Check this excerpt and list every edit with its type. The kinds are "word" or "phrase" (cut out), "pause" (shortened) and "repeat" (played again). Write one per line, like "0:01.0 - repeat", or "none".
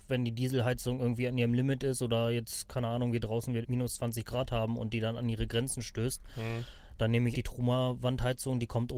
0:03.6 - word
0:07.3 - word

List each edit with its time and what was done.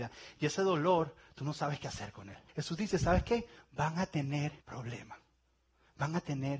0:02.5 - pause
0:04.6 - pause

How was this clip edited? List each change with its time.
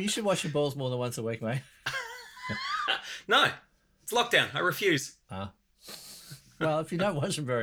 none

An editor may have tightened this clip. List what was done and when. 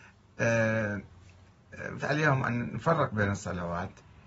0:02.0 - word

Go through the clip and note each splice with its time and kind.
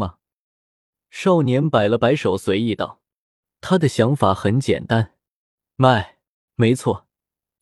0:06.5 - word

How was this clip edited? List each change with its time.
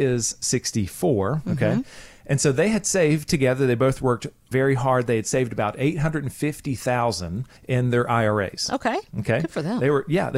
0:07.6 - pause

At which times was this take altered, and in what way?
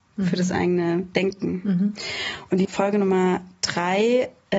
0:02.6 - word

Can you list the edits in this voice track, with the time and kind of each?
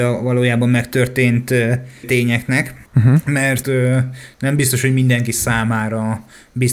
0:02.0 - phrase
0:02.9 - pause
0:03.6 - phrase

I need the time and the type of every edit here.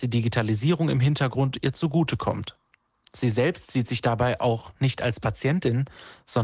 none

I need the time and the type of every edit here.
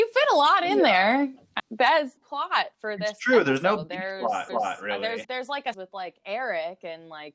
0:01.6 - word
0:02.2 - phrase
0:04.5 - repeat
0:05.2 - word
0:05.7 - word

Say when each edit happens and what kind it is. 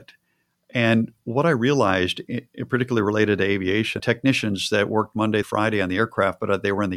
0:04.0 - phrase
0:05.4 - word

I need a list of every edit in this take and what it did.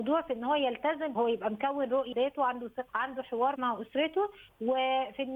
0:01.2 - word
0:02.1 - word
0:02.9 - word
0:03.6 - word

